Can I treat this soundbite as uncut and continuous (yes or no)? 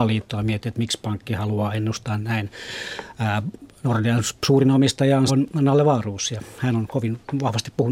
no